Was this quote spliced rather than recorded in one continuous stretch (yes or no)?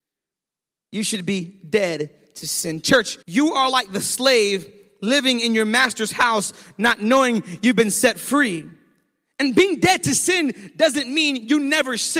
yes